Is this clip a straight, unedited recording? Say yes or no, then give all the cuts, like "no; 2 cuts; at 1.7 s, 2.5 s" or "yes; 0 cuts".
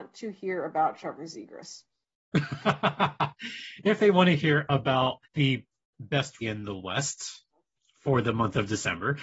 no; 2 cuts; at 5.2 s, 6.4 s